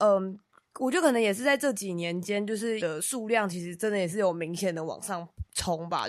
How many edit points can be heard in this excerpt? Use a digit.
1